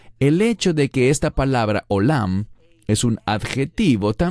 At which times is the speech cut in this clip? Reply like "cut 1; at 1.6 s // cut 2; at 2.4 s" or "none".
none